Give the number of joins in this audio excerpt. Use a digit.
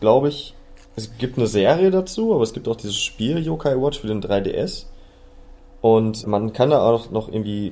1